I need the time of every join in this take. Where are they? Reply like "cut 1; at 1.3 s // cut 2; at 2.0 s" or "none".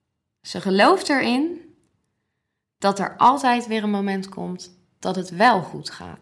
none